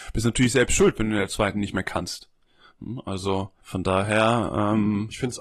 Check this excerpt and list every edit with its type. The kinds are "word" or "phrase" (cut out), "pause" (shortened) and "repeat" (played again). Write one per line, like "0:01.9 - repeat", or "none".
0:03.6 - pause